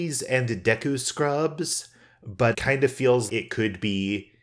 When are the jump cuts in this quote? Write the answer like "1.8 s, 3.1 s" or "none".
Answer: 2.5 s, 3.3 s